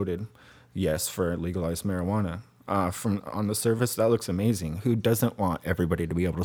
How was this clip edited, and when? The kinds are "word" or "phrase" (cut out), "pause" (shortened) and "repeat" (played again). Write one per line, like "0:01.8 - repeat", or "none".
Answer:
none